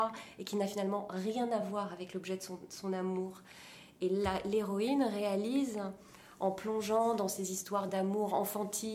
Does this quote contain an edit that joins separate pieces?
no; 0 cuts

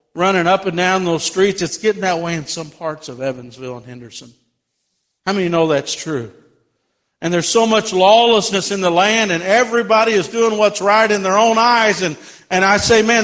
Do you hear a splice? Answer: no; 0 cuts

